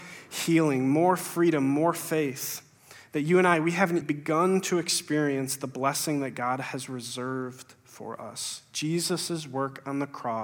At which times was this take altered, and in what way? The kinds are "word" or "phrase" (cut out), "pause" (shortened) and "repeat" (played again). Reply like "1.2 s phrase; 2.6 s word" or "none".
4.0 s word